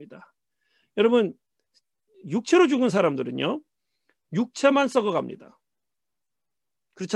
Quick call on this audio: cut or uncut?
uncut